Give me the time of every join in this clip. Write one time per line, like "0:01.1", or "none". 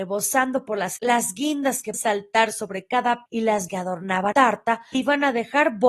0:01.0
0:01.9
0:03.3
0:03.7
0:04.3
0:04.9